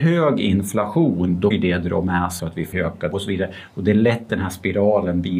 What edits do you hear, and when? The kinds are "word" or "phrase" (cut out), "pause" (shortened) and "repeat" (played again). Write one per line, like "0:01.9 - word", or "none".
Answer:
0:01.5 - word
0:02.4 - word
0:02.7 - word
0:03.1 - word
0:04.3 - word